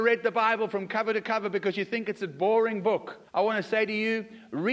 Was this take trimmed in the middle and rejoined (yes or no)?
yes